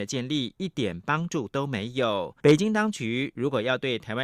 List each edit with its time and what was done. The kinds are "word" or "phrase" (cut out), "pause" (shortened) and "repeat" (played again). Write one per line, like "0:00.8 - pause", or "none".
0:02.4 - pause